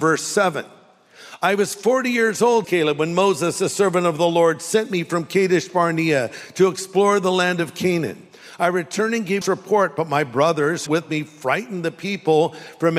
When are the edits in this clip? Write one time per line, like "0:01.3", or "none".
0:02.6
0:09.4
0:10.9